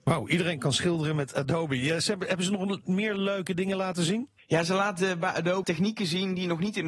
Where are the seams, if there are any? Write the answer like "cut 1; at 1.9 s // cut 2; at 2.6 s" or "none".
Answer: cut 1; at 4.4 s // cut 2; at 5.6 s